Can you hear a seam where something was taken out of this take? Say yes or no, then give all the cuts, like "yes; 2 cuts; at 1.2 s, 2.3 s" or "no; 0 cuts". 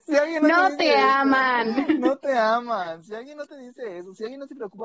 no; 0 cuts